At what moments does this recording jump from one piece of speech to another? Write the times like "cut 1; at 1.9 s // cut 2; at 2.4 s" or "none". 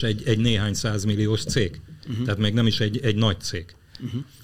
none